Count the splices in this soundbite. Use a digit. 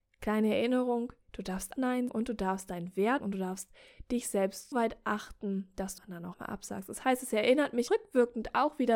7